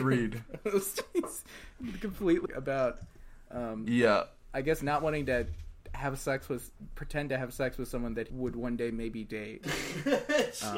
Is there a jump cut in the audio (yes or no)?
yes